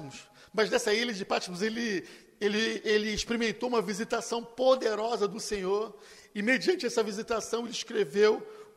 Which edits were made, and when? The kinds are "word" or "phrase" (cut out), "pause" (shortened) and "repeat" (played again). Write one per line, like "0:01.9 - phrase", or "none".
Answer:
none

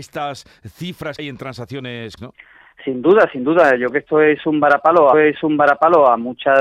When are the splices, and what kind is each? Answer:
0:01.2 - word
0:02.2 - word
0:03.9 - word
0:05.1 - repeat

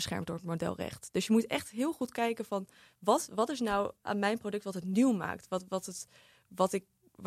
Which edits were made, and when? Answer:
none

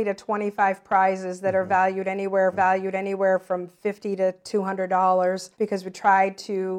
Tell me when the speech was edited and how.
0:02.5 - repeat
0:05.5 - pause

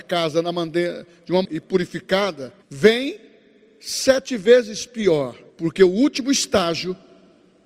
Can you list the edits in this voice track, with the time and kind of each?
0:01.4 - phrase
0:02.6 - pause
0:05.5 - pause

